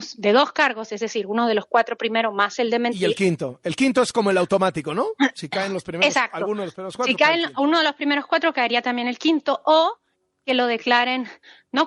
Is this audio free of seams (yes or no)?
yes